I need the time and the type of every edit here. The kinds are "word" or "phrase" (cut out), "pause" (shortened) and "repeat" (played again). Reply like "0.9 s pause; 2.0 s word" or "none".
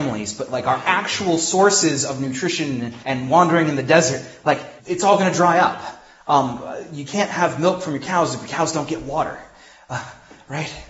3.0 s pause; 4.8 s pause